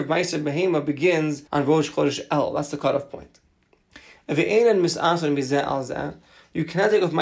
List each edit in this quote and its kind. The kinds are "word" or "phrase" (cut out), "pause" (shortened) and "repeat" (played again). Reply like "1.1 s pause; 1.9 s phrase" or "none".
1.5 s pause